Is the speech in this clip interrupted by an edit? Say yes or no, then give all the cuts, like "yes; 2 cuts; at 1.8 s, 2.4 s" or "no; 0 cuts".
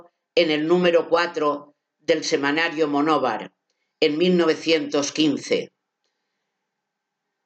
no; 0 cuts